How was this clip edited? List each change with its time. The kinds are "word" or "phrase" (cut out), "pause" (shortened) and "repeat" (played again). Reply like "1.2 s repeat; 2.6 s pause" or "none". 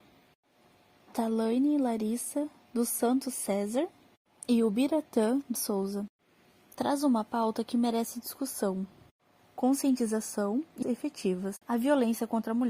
5.6 s word; 10.8 s word; 11.6 s pause